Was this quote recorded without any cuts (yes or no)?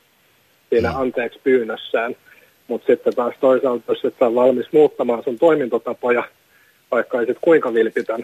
yes